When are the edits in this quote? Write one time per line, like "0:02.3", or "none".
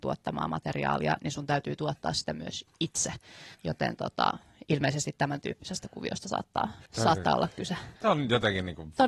0:03.5
0:06.9
0:08.0